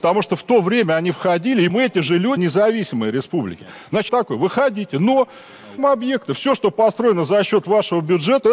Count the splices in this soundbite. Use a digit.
4